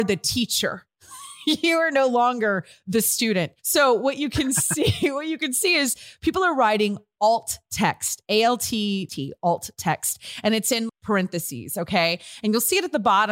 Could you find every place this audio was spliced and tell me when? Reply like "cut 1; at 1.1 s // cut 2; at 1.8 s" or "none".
cut 1; at 3.6 s // cut 2; at 9.1 s // cut 3; at 10.9 s